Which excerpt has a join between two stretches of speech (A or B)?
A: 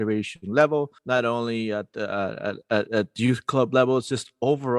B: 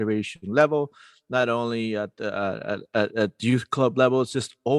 A